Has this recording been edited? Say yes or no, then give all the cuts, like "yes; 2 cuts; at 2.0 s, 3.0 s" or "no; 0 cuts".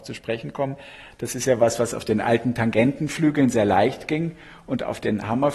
no; 0 cuts